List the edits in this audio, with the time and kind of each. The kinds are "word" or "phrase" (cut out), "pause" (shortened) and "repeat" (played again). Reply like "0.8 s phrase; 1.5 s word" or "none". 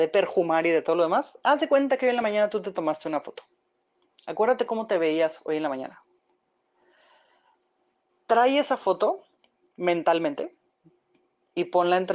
none